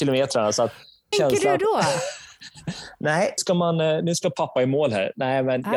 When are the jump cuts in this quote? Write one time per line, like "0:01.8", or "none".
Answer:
0:01.1
0:03.4